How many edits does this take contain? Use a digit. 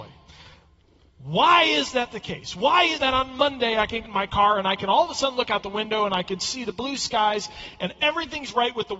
2